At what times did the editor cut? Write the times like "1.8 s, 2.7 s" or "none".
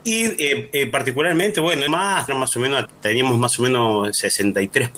1.9 s, 2.3 s, 2.9 s